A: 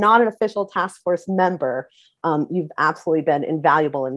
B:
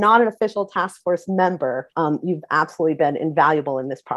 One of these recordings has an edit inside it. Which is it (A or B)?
B